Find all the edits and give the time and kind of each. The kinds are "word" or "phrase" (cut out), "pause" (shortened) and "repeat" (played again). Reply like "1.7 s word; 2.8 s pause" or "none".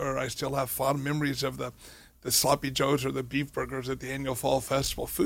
none